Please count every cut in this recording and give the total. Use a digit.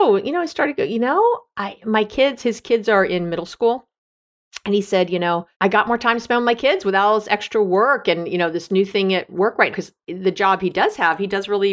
2